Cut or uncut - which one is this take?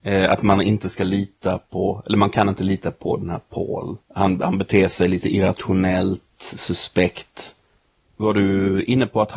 cut